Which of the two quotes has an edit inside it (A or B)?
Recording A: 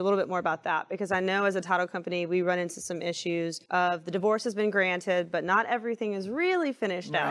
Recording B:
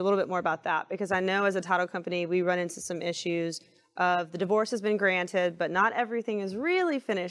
A